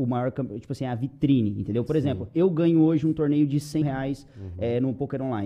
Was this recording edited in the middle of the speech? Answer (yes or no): yes